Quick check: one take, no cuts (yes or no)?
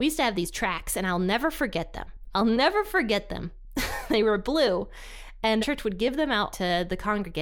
no